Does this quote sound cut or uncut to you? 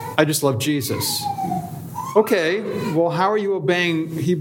uncut